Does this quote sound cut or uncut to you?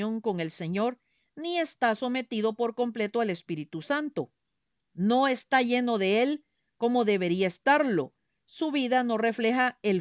uncut